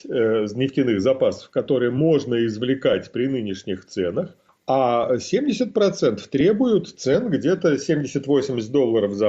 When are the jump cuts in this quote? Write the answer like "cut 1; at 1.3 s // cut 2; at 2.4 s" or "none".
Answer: cut 1; at 4.5 s